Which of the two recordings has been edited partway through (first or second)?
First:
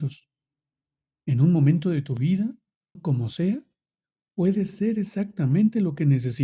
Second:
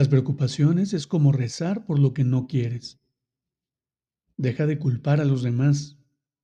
first